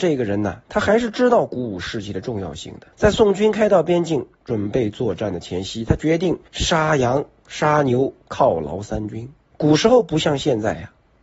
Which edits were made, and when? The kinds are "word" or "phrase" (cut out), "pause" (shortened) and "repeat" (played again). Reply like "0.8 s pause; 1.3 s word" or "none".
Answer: 2.9 s pause; 6.5 s pause; 9.5 s pause